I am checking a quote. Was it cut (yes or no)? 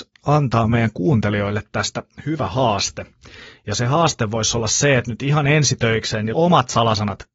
yes